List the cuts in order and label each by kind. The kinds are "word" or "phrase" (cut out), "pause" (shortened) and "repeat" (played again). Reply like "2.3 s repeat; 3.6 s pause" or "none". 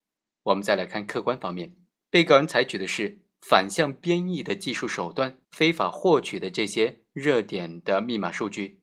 1.9 s pause; 5.4 s pause